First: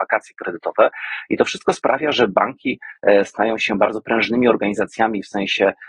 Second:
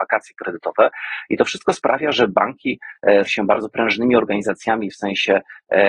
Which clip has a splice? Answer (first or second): second